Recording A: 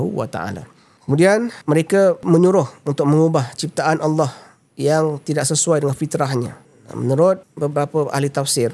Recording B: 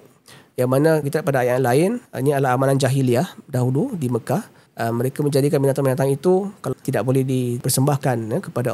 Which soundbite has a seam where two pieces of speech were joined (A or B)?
B